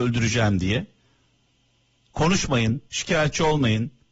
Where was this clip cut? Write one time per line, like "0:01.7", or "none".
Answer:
0:02.9